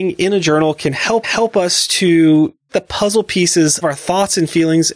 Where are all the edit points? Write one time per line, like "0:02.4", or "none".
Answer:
0:01.2
0:02.7
0:03.8